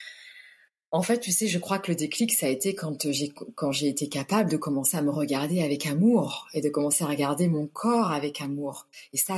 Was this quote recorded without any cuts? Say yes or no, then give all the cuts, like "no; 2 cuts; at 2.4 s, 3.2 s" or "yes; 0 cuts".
yes; 0 cuts